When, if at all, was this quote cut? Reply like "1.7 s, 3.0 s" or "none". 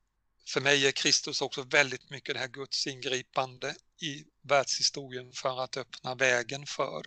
3.9 s